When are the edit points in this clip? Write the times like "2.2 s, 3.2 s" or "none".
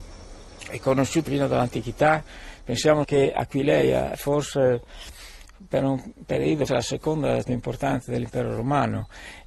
1.3 s, 3.0 s, 4.1 s, 6.7 s, 7.4 s